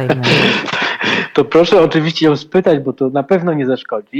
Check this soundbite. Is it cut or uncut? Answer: uncut